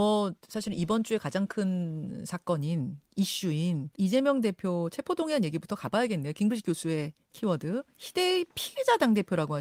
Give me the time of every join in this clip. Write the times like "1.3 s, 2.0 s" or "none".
3.9 s